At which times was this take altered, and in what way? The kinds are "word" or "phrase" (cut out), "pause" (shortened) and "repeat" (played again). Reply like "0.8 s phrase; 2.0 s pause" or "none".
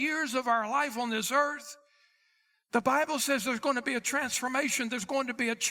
none

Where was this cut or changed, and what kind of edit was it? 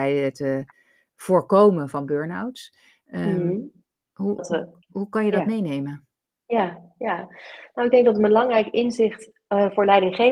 4.4 s word

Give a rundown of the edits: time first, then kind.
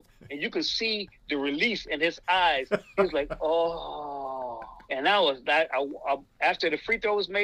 4.8 s pause

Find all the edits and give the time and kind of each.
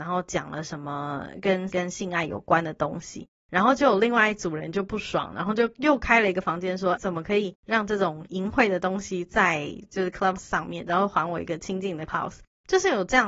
1.7 s word; 7.0 s word; 10.4 s word; 12.1 s word

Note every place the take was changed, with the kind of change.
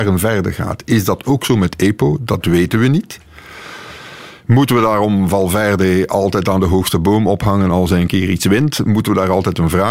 none

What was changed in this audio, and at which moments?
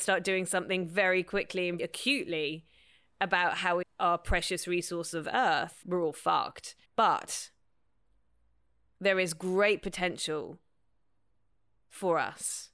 1.8 s word; 3.8 s phrase; 5.8 s word; 6.8 s pause

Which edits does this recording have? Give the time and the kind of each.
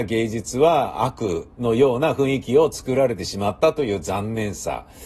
1.5 s pause

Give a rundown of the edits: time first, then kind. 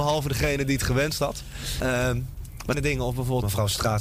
2.7 s phrase

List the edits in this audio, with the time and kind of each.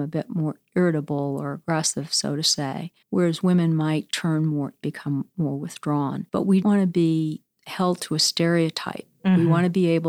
3.0 s pause; 4.8 s phrase; 6.3 s pause; 6.6 s word

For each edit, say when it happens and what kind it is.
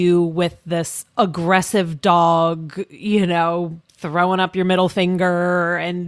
3.8 s pause

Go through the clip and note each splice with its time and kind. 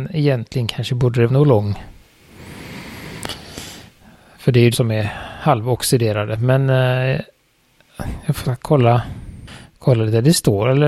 1.3 s word; 4.7 s word; 8.4 s word

